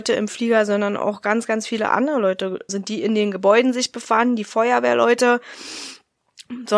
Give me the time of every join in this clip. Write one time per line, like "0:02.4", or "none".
0:02.7